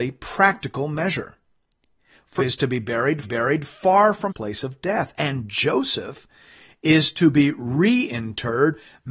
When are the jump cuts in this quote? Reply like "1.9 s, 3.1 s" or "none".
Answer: 2.4 s, 3.2 s, 4.3 s